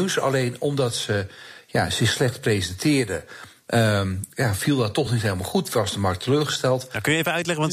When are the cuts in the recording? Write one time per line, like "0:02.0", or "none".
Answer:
none